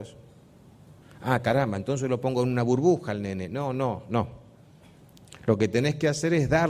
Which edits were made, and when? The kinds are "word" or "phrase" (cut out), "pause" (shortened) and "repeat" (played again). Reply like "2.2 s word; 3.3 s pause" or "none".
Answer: 1.0 s pause